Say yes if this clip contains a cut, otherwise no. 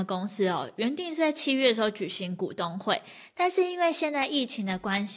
no